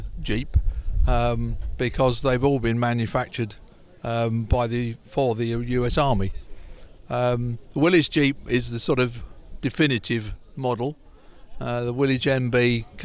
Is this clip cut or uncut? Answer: uncut